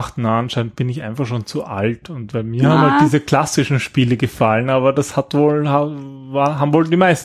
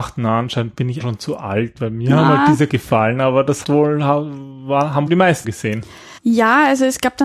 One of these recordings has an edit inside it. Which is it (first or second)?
second